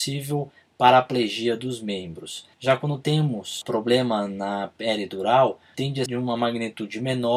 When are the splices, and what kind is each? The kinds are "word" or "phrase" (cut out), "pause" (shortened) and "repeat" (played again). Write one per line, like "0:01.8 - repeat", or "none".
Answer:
0:02.5 - pause
0:05.7 - word
0:06.1 - word